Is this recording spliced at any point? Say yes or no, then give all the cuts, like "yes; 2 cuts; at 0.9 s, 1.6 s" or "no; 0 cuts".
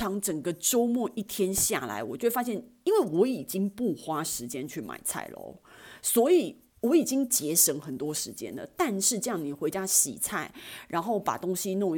yes; 1 cut; at 6.7 s